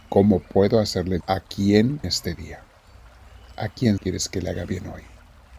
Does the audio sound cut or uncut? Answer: cut